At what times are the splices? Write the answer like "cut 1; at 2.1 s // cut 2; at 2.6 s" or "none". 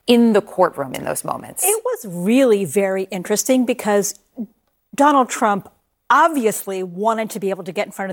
none